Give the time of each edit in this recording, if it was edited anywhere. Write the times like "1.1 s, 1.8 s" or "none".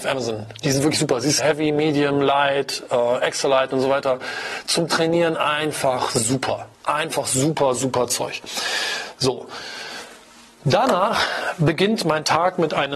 1.4 s, 6.7 s